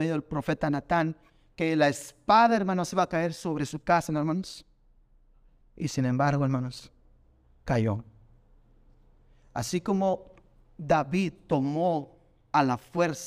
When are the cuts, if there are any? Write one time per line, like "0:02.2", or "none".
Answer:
none